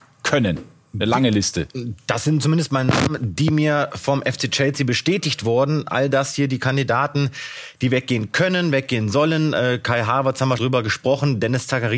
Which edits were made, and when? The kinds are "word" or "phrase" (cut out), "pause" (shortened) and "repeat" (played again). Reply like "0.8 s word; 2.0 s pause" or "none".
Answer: 10.6 s word